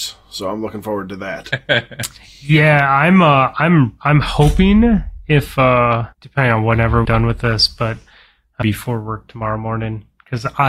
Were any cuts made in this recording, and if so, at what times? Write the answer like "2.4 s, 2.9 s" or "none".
6.1 s, 7.0 s, 8.6 s

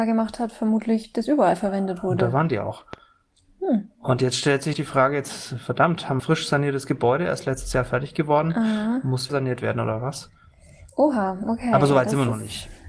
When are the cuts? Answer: 4.7 s, 6.2 s, 9.3 s

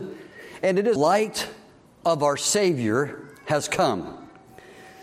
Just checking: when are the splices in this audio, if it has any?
1.0 s

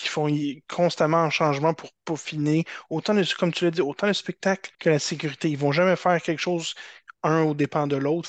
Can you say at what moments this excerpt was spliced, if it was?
4.7 s

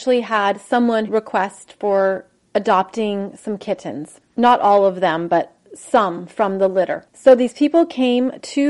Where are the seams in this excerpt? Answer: 1.1 s

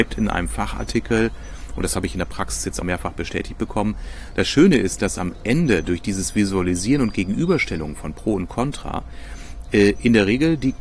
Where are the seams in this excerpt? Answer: 2.8 s

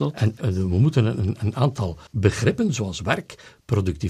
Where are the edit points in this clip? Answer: 2.1 s

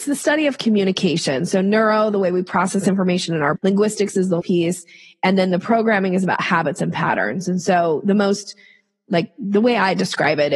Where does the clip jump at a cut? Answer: 3.6 s, 4.4 s

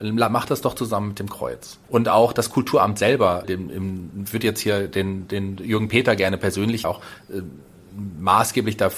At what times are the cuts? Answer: 1.8 s, 3.4 s, 6.8 s

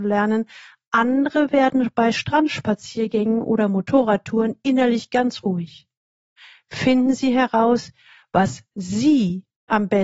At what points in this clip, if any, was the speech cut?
none

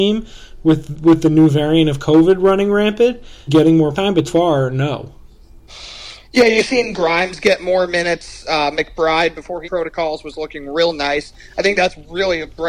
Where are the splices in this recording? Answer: 3.5 s, 3.9 s, 4.3 s, 9.6 s

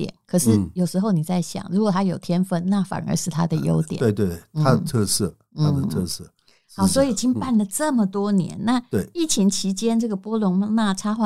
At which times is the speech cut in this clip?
none

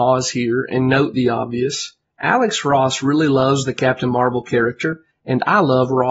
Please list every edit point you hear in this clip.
none

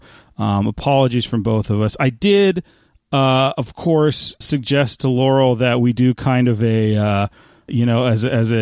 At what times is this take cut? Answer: 4.4 s, 7.7 s

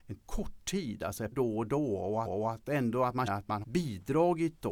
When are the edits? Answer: 1.3 s, 2.3 s, 3.3 s, 3.6 s

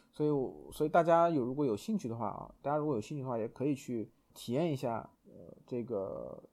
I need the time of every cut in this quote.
4.3 s, 5.2 s

